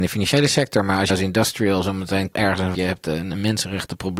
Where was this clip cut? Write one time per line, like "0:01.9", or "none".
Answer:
0:01.1
0:02.3
0:02.7